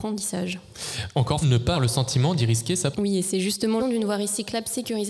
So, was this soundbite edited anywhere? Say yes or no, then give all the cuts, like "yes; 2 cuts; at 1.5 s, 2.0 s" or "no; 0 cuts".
yes; 4 cuts; at 1.4 s, 1.7 s, 2.9 s, 3.8 s